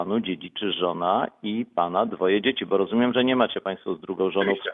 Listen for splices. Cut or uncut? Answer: uncut